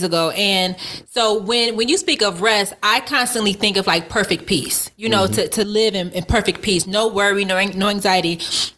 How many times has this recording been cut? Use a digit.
0